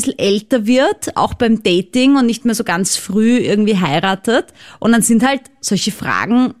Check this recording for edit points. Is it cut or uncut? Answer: uncut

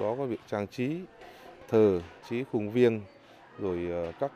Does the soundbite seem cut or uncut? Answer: cut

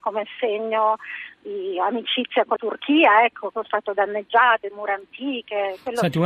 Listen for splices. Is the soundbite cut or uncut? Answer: cut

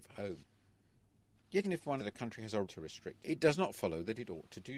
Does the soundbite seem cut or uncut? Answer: cut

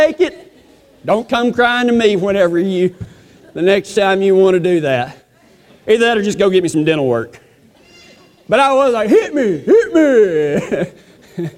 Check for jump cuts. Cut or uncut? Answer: uncut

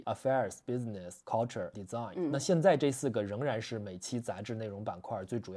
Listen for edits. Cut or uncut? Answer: cut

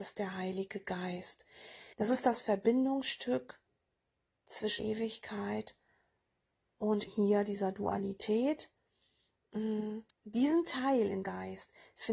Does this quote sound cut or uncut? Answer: cut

